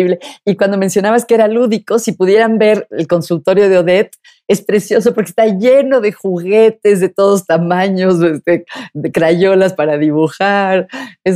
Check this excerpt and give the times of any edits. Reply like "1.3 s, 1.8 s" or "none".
none